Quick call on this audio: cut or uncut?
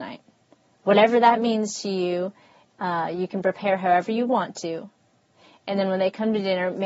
uncut